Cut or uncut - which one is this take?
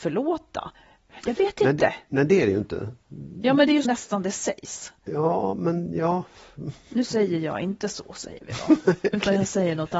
cut